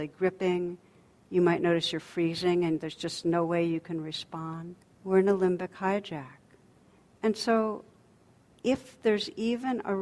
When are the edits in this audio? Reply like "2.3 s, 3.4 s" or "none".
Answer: 4.8 s